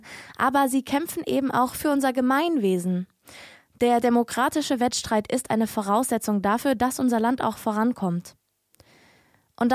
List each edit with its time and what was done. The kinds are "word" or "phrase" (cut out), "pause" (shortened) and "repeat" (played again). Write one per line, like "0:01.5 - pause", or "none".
none